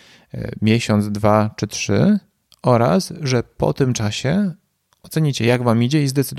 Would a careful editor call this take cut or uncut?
uncut